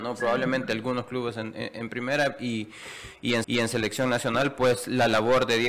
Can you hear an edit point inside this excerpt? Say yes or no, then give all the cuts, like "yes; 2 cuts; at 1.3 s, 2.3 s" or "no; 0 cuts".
yes; 1 cut; at 3.4 s